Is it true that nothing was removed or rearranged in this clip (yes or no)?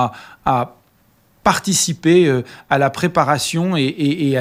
yes